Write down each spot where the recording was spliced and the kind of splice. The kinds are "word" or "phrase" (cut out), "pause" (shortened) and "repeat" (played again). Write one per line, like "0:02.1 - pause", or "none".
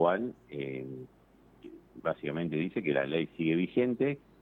none